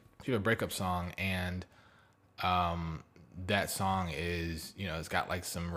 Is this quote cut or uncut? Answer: uncut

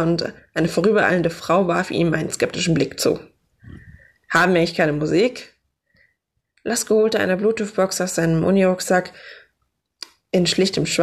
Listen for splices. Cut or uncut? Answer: uncut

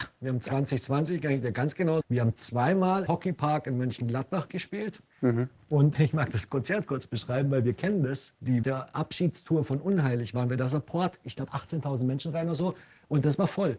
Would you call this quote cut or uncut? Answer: cut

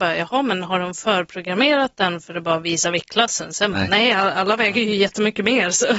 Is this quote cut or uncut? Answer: uncut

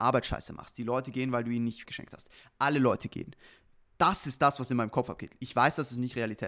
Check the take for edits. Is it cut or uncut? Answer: cut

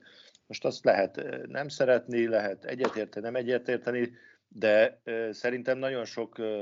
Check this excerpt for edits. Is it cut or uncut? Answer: uncut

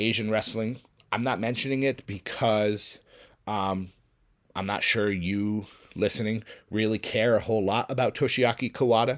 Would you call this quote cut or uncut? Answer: uncut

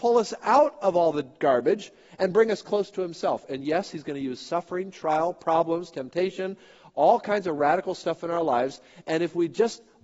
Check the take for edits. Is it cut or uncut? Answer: uncut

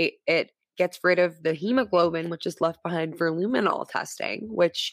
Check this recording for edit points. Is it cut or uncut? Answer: uncut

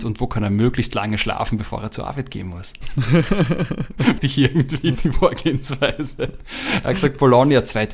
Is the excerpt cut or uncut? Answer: cut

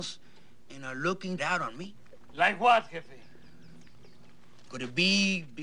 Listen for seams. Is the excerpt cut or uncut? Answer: cut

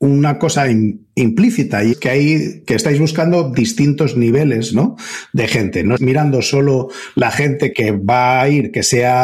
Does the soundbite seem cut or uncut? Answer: cut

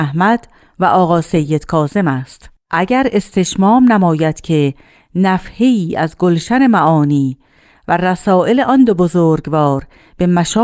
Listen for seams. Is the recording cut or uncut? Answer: uncut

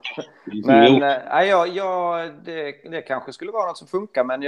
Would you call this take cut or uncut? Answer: uncut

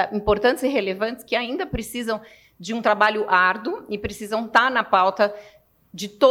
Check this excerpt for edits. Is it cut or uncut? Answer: uncut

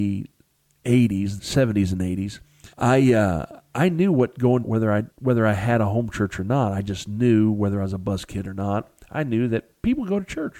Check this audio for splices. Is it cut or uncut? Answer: cut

